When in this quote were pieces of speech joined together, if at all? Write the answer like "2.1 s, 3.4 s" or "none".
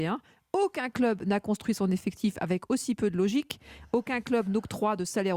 none